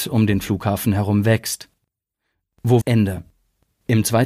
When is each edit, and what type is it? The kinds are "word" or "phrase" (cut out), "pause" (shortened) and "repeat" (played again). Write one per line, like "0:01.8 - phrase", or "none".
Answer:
0:02.8 - word